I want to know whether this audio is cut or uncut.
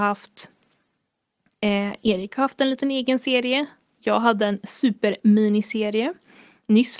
uncut